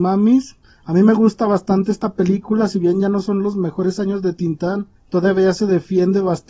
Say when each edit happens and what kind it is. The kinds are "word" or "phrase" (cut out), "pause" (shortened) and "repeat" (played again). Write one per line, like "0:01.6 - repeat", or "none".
0:05.0 - pause